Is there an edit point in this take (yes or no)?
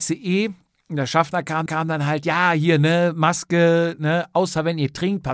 yes